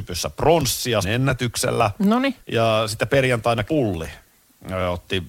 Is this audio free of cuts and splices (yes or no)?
no